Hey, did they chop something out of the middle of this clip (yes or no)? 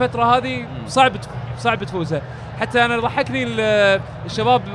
no